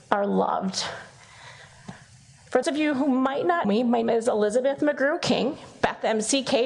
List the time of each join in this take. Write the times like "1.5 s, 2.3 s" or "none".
2.6 s, 3.6 s, 4.0 s